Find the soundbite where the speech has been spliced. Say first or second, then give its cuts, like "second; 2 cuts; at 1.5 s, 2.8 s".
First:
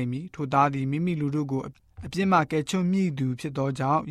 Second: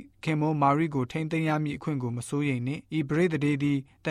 second; 1 cut; at 2.9 s